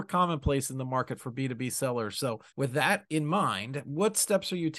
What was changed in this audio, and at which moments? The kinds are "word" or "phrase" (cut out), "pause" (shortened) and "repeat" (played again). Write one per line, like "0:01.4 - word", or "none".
0:02.5 - pause